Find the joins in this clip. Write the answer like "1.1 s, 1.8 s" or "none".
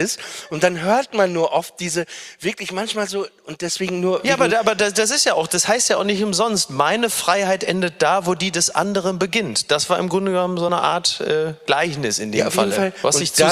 none